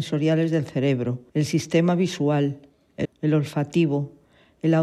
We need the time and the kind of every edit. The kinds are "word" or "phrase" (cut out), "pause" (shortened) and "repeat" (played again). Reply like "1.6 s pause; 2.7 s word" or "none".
1.3 s pause; 3.0 s word